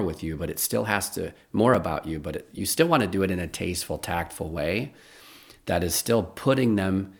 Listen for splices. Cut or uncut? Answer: uncut